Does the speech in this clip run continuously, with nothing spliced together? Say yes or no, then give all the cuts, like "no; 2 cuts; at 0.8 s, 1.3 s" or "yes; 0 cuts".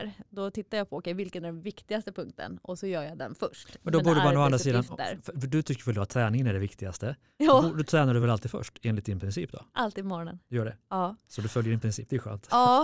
yes; 0 cuts